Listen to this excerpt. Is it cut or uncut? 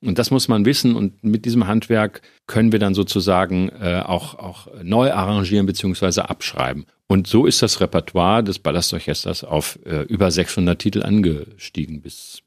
uncut